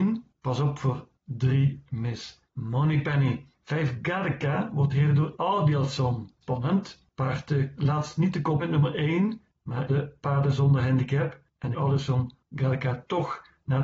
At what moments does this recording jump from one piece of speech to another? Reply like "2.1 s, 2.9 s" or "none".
2.4 s, 4.9 s, 5.3 s, 7.8 s, 8.6 s, 9.9 s, 11.7 s